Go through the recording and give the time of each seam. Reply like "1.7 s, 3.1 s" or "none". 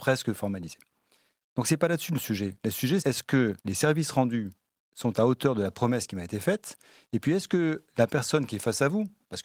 3.0 s, 3.6 s